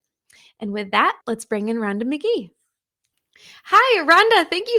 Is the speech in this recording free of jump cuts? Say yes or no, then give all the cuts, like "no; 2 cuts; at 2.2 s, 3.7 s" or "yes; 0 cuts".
no; 1 cut; at 1.2 s